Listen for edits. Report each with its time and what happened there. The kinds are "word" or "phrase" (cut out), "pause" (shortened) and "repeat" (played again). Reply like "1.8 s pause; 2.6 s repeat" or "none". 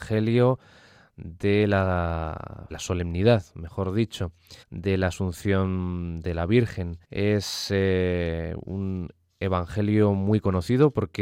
2.7 s phrase; 4.6 s pause; 7.0 s pause